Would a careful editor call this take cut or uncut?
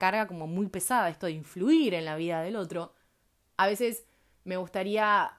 uncut